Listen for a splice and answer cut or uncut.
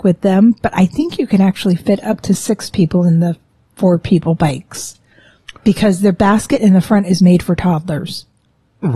uncut